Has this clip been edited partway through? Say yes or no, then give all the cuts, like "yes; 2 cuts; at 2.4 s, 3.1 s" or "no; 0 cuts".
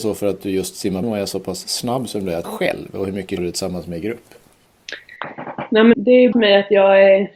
yes; 5 cuts; at 1.0 s, 2.4 s, 3.4 s, 5.9 s, 6.3 s